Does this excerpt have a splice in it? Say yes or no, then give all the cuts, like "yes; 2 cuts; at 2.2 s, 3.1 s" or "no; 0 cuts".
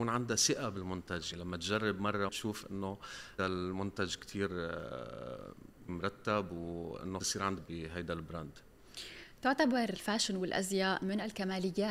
yes; 7 cuts; at 1.3 s, 2.3 s, 3.4 s, 5.9 s, 7.2 s, 7.6 s, 9.9 s